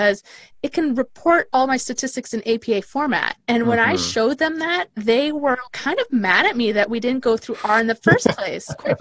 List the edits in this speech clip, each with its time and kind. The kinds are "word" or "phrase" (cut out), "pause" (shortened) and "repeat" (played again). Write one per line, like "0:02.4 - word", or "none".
0:03.4 - pause
0:04.9 - pause
0:05.7 - word